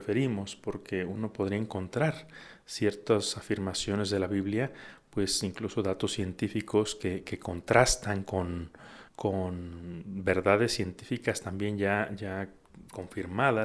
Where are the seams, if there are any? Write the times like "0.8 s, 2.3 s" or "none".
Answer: 9.1 s